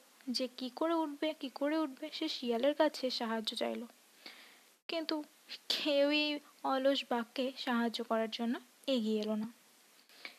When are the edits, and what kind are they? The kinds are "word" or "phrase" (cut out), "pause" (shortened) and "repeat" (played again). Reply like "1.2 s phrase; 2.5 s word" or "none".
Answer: none